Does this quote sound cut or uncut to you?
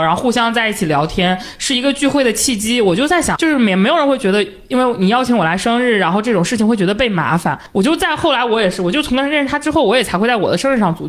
cut